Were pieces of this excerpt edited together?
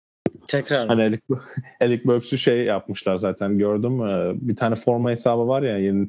no; 0 cuts

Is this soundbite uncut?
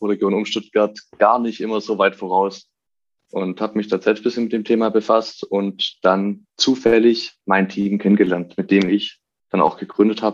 yes; 0 cuts

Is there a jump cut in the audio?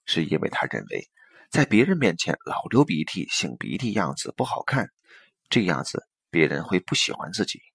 no; 0 cuts

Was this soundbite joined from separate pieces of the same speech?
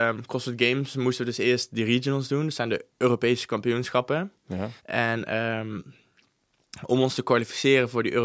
yes; 1 cut; at 4.8 s

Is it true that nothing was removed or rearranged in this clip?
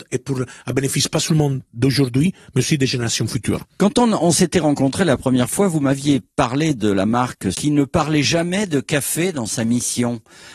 no; 1 cut; at 7.5 s

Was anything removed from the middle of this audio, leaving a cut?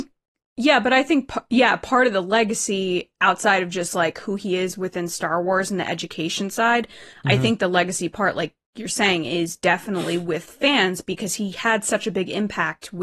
no; 0 cuts

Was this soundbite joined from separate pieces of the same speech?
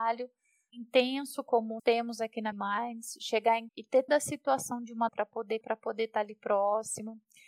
yes; 6 cuts; at 1.8 s, 2.5 s, 3.7 s, 4.1 s, 5.1 s, 5.6 s

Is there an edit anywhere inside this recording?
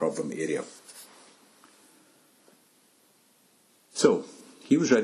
no; 0 cuts

